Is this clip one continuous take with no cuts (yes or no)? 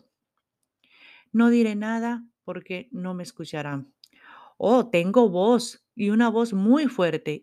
yes